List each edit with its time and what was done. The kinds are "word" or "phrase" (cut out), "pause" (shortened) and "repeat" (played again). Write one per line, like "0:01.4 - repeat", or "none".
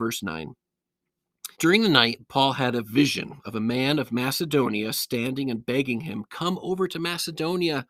0:01.5 - pause